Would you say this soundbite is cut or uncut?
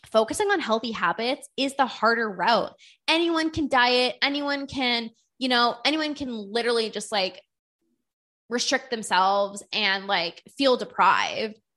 uncut